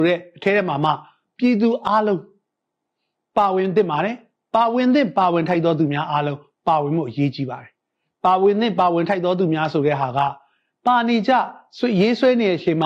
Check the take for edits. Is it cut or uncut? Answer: uncut